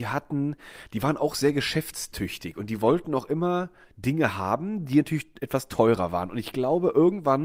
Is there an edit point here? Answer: no; 0 cuts

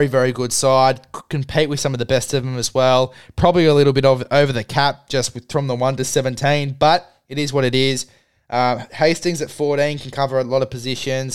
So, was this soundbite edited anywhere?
no; 0 cuts

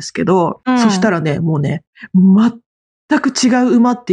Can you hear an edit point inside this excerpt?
no; 0 cuts

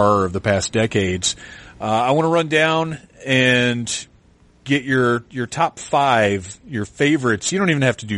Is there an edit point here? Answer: no; 0 cuts

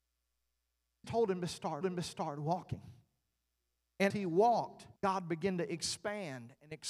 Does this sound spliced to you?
yes; 4 cuts; at 1.0 s, 1.8 s, 4.1 s, 5.0 s

